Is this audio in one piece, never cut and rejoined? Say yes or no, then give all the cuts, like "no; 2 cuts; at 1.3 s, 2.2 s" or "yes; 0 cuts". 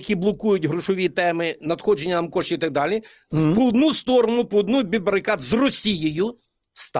yes; 0 cuts